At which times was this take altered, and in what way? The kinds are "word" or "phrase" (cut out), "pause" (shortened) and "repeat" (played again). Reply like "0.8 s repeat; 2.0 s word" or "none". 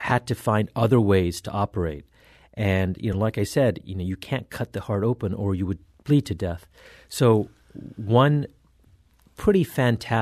none